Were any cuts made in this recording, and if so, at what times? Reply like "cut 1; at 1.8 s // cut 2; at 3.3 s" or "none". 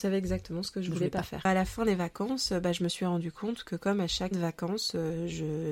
cut 1; at 4.3 s